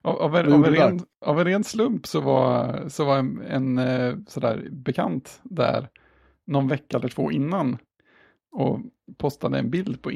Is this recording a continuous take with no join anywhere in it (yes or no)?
yes